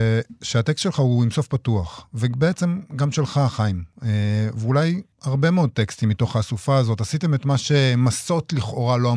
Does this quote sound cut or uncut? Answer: cut